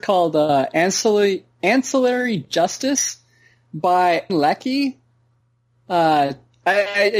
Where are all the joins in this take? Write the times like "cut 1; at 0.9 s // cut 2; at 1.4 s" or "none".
cut 1; at 4.3 s